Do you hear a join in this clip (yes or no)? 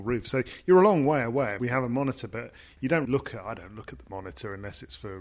yes